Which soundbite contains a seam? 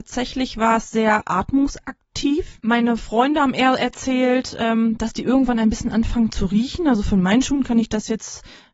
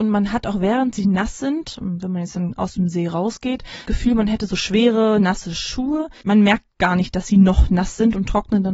second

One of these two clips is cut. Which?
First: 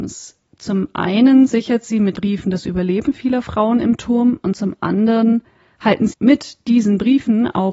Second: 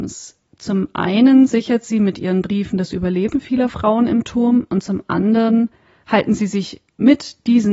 first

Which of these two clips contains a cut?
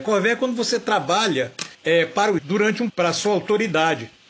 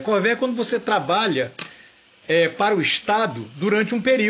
first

